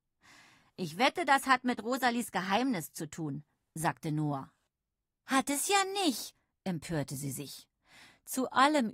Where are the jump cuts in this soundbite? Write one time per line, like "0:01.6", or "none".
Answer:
none